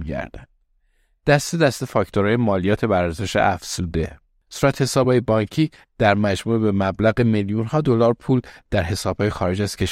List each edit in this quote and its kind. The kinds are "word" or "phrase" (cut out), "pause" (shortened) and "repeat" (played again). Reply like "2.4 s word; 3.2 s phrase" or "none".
none